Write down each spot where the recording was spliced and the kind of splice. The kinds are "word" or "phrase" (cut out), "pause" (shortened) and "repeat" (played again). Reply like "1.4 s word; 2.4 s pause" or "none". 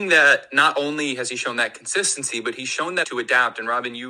3.0 s word